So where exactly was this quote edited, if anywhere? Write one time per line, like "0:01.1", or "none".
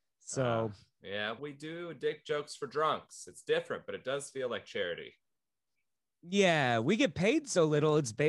0:01.4

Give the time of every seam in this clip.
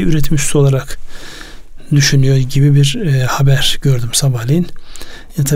none

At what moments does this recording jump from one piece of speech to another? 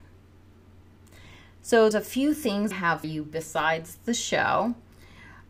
0:01.9
0:02.7
0:03.0

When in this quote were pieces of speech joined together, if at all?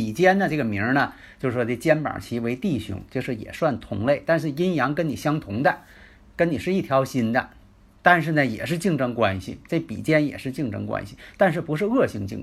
none

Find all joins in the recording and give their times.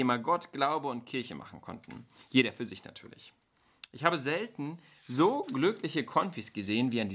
none

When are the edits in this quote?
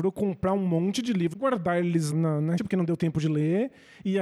0:01.3
0:02.1
0:02.6

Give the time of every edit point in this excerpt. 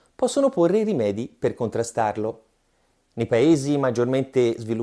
none

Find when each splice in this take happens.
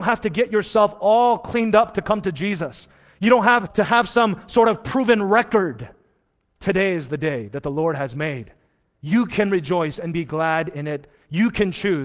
none

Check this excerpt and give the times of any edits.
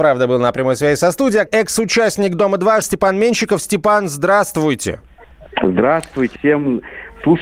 0:01.5
0:02.8
0:06.4

